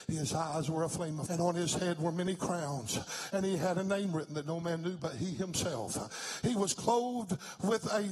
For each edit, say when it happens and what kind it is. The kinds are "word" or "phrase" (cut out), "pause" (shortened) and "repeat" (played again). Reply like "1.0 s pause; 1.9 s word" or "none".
1.3 s word